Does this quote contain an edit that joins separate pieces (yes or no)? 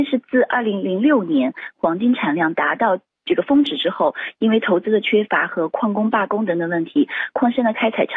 no